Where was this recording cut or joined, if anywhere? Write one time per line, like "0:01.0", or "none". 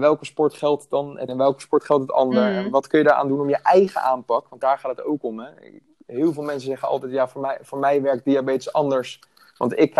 0:01.3